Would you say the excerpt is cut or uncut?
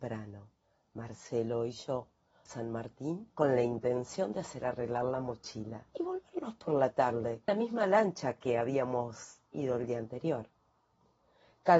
cut